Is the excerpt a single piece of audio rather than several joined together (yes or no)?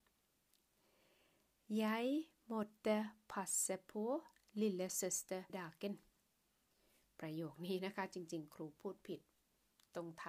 no